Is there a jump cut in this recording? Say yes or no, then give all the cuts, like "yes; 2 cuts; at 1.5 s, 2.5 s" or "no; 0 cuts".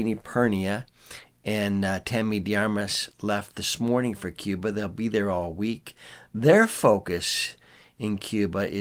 no; 0 cuts